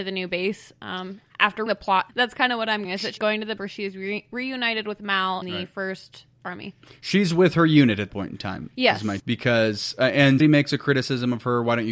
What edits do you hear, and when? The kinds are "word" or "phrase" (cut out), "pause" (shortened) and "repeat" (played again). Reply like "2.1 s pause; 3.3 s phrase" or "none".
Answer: 1.7 s word; 2.1 s word; 2.8 s word; 3.2 s word; 3.6 s word; 5.4 s word; 8.1 s word; 9.2 s word; 10.4 s word